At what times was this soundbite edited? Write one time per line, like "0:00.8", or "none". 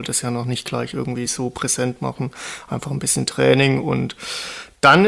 none